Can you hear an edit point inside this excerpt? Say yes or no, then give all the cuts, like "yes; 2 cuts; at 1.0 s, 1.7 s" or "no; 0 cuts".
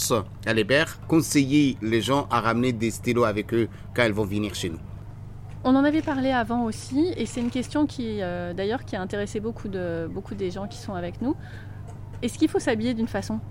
no; 0 cuts